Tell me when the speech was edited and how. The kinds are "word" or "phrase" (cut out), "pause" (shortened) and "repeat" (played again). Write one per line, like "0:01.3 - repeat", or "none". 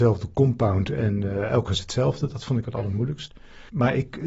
0:01.7 - word
0:02.6 - word